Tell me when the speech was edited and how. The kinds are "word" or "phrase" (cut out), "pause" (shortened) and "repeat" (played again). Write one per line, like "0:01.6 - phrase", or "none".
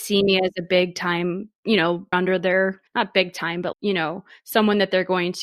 0:02.1 - word
0:02.9 - pause
0:03.7 - word